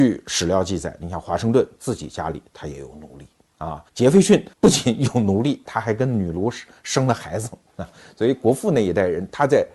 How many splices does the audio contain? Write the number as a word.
three